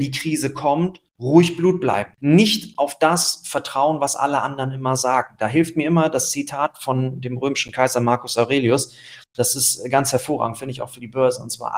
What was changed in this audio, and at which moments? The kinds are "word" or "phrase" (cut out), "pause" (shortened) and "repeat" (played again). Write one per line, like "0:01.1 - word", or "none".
0:01.1 - pause
0:02.2 - pause